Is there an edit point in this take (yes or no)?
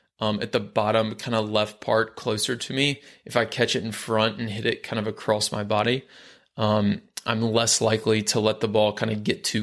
no